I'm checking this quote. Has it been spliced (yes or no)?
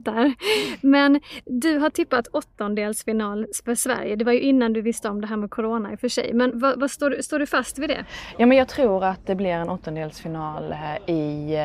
yes